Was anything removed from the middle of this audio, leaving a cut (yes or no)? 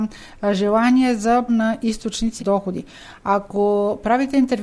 yes